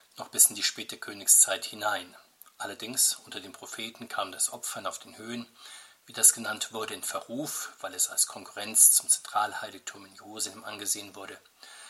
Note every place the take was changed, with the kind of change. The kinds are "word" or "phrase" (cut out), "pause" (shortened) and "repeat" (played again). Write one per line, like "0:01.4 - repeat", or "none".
none